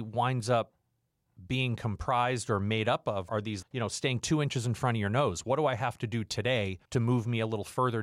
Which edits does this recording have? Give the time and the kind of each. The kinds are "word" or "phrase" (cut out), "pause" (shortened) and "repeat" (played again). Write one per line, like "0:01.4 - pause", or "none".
0:03.3 - word
0:03.6 - word
0:06.8 - pause